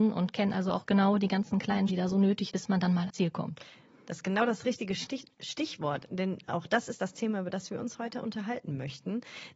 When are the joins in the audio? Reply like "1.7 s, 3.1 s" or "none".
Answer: 1.9 s, 2.5 s, 3.1 s

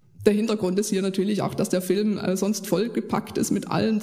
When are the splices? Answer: none

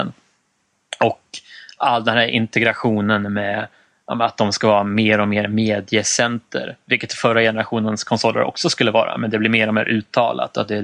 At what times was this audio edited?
none

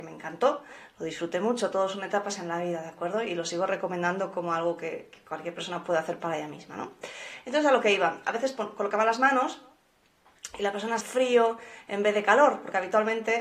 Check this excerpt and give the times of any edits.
11.0 s

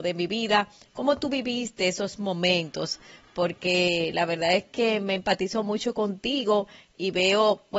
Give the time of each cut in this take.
none

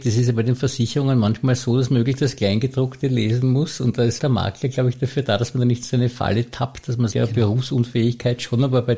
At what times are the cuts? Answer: 4.2 s, 7.1 s

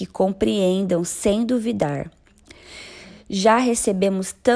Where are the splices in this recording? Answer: none

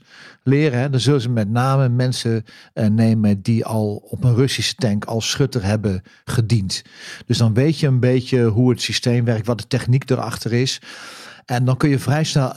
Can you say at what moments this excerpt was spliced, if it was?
none

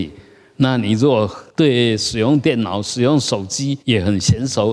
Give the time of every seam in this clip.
1.5 s, 3.8 s

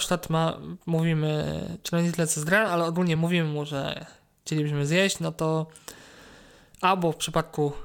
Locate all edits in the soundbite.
none

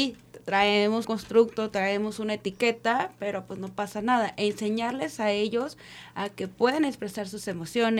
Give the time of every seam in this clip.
1.0 s

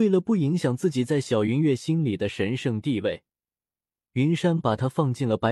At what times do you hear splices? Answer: none

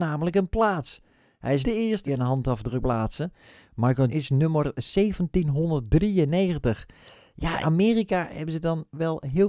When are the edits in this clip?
1.6 s, 2.1 s, 2.8 s, 4.1 s, 7.6 s

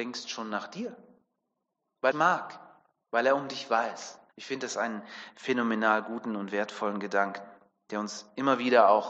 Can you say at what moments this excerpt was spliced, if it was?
2.1 s, 4.3 s

